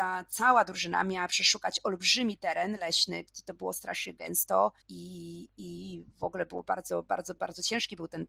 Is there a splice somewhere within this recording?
yes; 1 cut; at 4.8 s

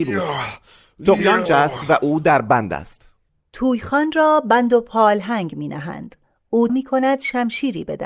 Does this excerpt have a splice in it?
yes; 2 cuts; at 1.5 s, 6.7 s

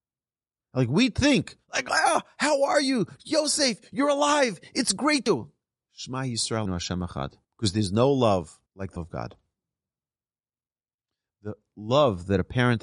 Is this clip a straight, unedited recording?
no; 6 cuts; at 1.6 s, 5.3 s, 6.7 s, 7.4 s, 8.7 s, 9.0 s

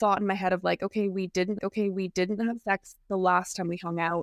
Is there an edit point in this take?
yes; 1 cut; at 1.6 s

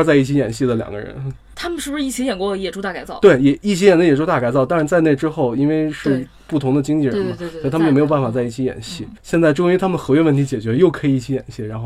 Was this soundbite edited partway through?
yes; 1 cut; at 9.2 s

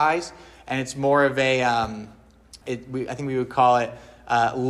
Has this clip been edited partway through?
yes; 1 cut; at 2.6 s

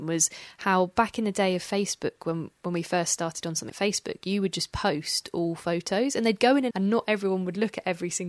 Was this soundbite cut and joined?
yes; 2 cuts; at 3.7 s, 6.7 s

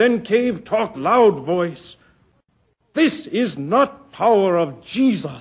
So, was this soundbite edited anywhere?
yes; 1 cut; at 0.9 s

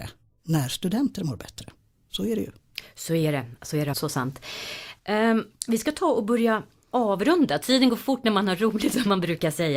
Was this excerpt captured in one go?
no; 1 cut; at 3.9 s

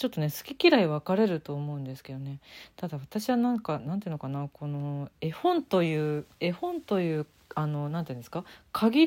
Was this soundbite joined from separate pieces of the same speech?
yes; 1 cut; at 6.3 s

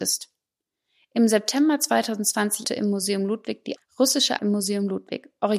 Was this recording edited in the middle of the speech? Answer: yes; 3 cuts; at 2.6 s, 3.8 s, 4.4 s

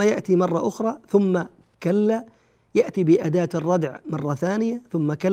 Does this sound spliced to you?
no; 0 cuts

